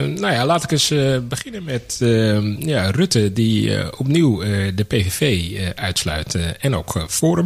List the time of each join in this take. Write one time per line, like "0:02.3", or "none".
none